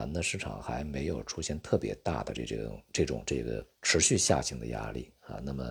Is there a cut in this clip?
yes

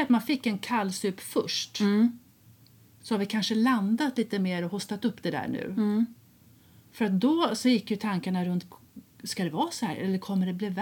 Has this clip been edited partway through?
no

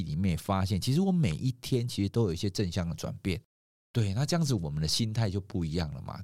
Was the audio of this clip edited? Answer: no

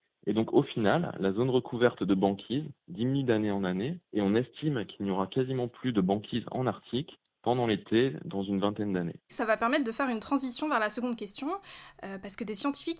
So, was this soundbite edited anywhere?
yes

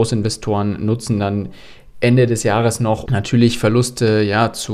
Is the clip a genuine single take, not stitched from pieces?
no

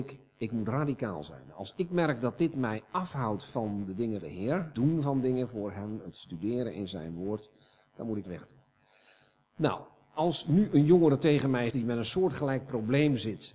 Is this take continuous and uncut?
no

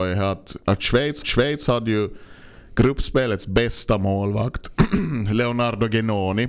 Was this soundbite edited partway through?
yes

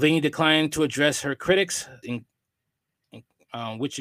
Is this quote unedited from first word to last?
no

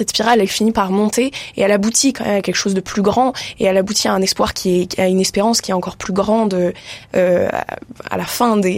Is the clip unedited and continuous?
yes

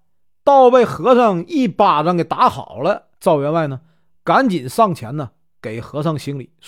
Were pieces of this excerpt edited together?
yes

